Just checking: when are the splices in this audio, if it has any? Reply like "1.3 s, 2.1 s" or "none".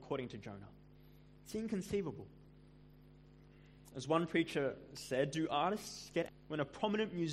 6.3 s